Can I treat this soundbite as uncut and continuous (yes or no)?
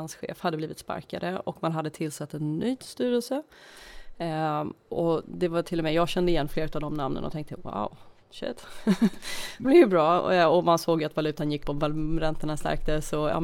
no